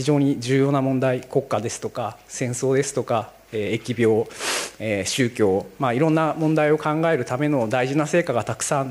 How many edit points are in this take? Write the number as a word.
zero